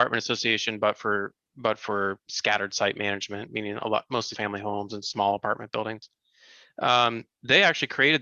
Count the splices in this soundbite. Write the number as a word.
two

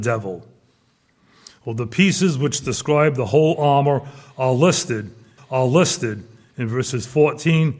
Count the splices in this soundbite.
one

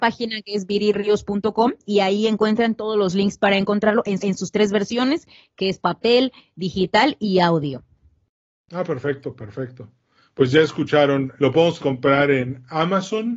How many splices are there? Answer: three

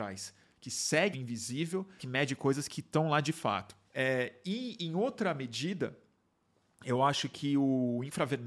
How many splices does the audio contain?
three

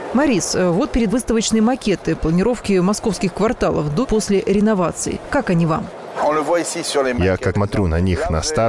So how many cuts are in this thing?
three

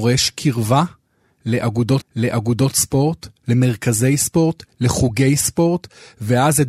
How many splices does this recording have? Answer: one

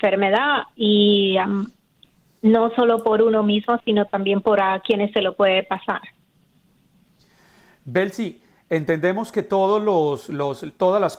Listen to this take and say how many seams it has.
zero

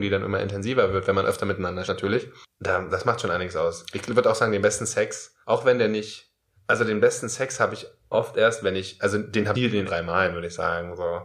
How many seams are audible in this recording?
six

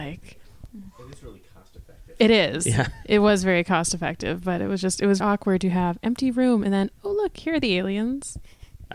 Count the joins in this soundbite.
one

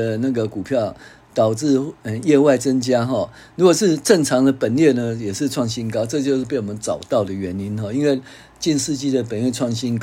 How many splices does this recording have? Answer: zero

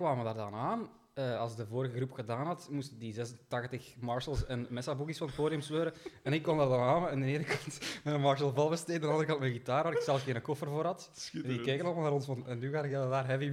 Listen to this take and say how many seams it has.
zero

